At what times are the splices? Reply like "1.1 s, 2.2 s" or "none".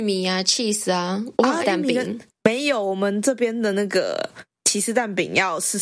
1.6 s

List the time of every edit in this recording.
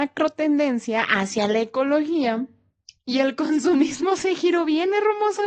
none

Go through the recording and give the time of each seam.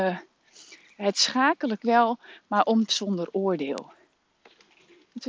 1.8 s, 2.9 s

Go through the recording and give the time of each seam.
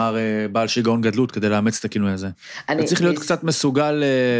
none

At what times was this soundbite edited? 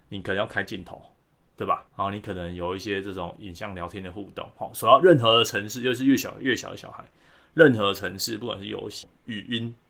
1.9 s

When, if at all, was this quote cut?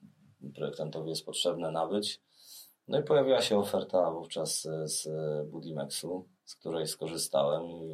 6.4 s

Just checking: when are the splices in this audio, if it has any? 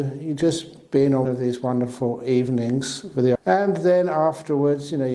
1.3 s, 3.4 s

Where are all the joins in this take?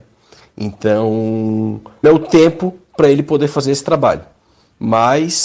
2.0 s

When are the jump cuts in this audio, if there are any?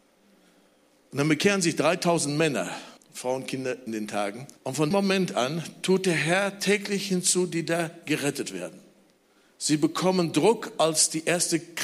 3.0 s, 3.9 s, 4.6 s, 4.9 s, 9.3 s

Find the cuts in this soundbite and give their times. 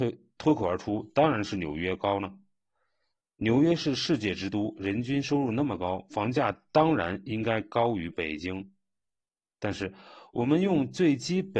none

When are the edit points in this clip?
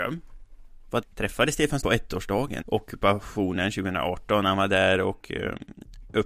1.0 s, 1.8 s, 2.6 s

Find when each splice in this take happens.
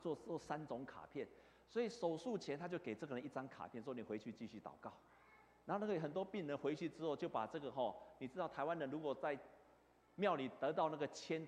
none

